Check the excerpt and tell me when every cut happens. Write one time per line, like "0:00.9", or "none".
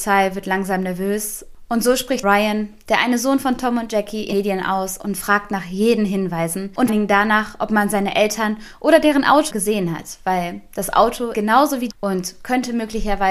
0:02.2
0:04.3
0:06.9
0:09.5
0:11.3
0:11.9